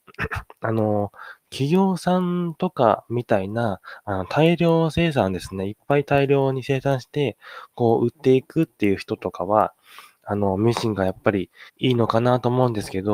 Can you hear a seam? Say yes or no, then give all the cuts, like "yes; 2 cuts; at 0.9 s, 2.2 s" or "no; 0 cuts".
yes; 1 cut; at 11.7 s